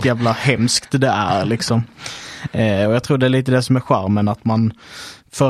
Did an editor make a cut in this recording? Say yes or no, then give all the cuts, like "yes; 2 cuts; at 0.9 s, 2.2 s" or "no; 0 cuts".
no; 0 cuts